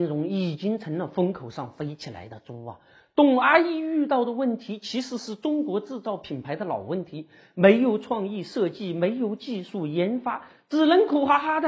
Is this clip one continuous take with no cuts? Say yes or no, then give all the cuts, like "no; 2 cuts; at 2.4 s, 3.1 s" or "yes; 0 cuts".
yes; 0 cuts